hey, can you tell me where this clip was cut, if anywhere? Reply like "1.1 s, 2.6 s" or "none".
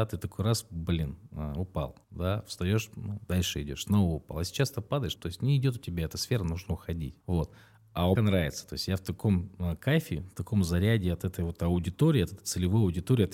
2.0 s, 5.2 s, 7.2 s, 8.2 s